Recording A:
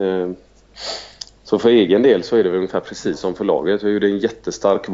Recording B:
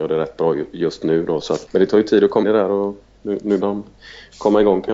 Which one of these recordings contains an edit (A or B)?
B